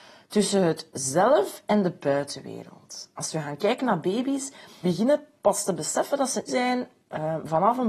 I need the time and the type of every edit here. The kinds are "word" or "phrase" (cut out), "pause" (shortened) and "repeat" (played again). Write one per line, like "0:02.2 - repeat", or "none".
0:04.8 - word
0:06.5 - word